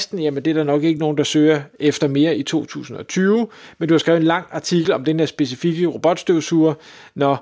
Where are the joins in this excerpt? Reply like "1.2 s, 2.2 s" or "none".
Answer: none